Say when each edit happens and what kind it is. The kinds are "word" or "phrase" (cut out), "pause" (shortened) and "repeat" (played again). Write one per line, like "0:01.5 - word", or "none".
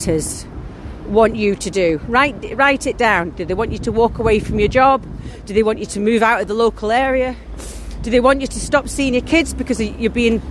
none